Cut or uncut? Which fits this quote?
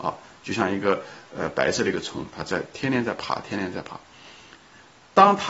uncut